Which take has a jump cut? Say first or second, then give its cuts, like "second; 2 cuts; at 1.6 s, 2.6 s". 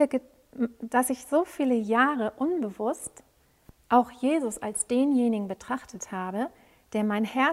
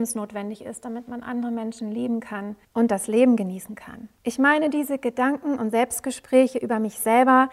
second; 2 cuts; at 2.6 s, 4.2 s